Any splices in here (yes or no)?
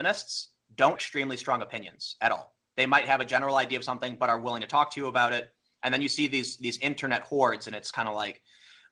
yes